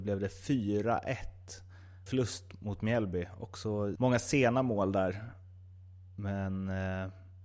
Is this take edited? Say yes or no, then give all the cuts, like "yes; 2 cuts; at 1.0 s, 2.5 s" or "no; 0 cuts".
yes; 2 cuts; at 2.1 s, 4.0 s